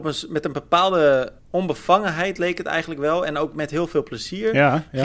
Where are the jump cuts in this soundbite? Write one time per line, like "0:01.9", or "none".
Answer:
0:01.4